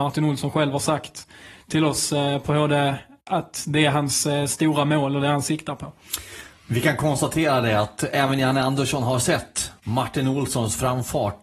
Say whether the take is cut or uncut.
uncut